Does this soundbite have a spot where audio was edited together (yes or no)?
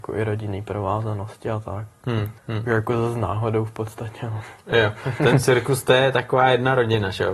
yes